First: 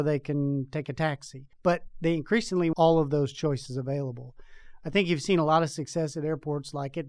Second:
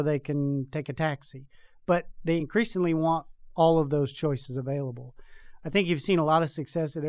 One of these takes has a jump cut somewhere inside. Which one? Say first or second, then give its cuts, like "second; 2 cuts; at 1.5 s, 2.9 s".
first; 2 cuts; at 1.5 s, 2.7 s